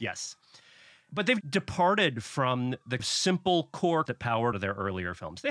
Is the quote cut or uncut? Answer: cut